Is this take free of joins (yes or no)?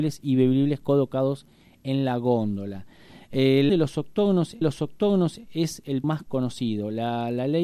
no